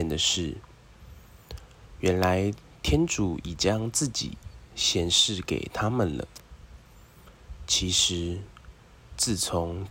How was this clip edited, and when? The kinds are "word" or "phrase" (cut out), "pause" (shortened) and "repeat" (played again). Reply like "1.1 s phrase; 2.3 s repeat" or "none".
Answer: none

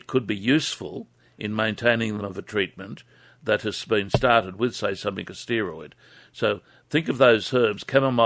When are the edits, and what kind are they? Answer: 2.2 s phrase; 5.3 s word

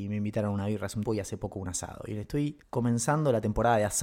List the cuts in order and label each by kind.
1.1 s word; 2.6 s pause

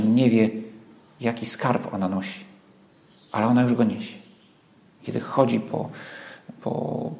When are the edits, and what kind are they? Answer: none

